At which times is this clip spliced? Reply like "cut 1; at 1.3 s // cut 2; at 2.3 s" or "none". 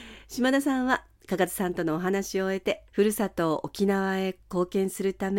cut 1; at 2.9 s